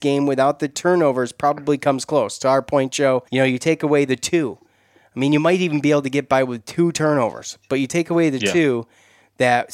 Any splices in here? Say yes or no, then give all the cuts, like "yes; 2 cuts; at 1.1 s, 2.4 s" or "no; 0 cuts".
yes; 1 cut; at 3.3 s